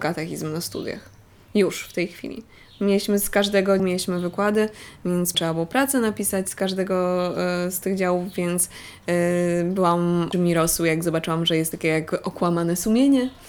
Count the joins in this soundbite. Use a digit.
4